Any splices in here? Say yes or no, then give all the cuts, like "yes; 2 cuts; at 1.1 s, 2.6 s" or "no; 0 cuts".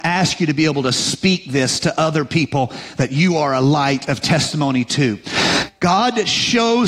no; 0 cuts